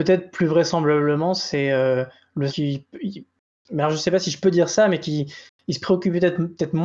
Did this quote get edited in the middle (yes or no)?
yes